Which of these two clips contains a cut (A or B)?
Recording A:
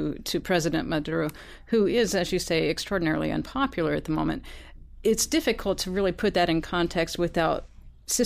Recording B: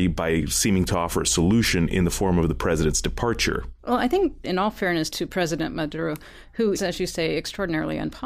B